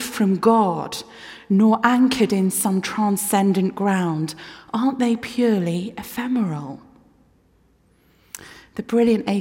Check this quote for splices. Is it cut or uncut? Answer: uncut